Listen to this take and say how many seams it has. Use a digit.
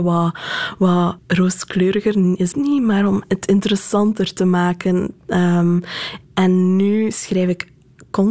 3